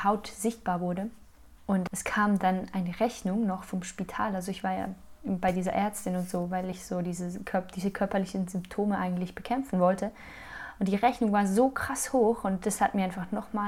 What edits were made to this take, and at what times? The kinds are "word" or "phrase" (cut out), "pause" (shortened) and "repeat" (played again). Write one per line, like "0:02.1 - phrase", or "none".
none